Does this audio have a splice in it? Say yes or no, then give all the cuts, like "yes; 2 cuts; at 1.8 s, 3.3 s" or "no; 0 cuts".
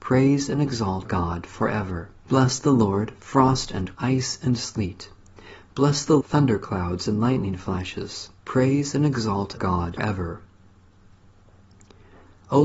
yes; 7 cuts; at 1.0 s, 2.2 s, 3.9 s, 6.2 s, 8.4 s, 9.6 s, 10.0 s